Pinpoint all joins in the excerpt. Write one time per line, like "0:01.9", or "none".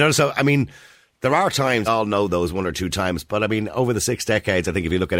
0:01.9

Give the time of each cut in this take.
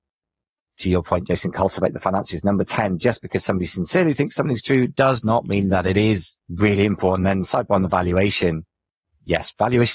0:06.4

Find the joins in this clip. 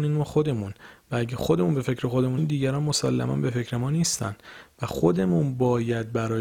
0:02.4

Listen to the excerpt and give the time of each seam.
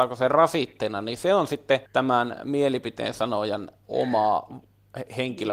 0:01.9

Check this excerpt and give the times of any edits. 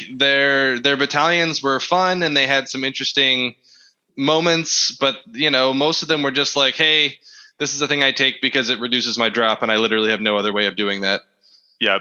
none

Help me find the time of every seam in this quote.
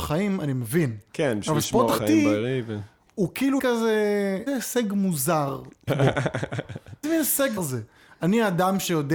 0:02.0
0:03.6
0:04.5
0:05.9
0:07.0
0:07.6

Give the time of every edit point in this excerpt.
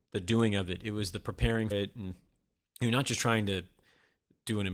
0:01.7

